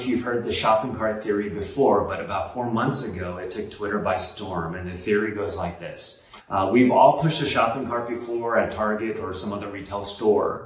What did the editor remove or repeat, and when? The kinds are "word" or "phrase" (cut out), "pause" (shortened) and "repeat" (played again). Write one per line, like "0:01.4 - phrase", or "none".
0:06.4 - pause

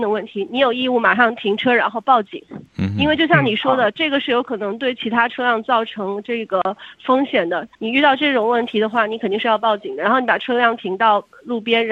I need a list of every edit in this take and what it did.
0:02.7 - pause
0:07.7 - pause

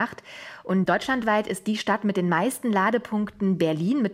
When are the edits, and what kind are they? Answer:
none

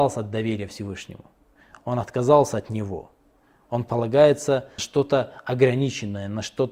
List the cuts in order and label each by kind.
0:04.8 - word

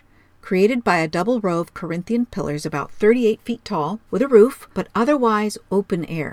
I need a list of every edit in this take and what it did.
0:04.1 - pause
0:04.7 - pause

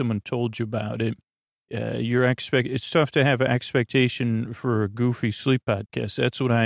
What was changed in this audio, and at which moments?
0:01.4 - pause

